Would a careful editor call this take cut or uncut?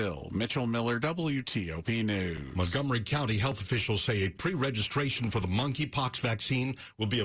uncut